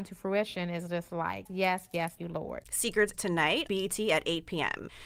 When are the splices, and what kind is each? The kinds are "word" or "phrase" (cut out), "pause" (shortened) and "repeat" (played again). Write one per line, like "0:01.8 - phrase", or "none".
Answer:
0:01.5 - word
0:02.2 - word
0:03.1 - word
0:03.7 - word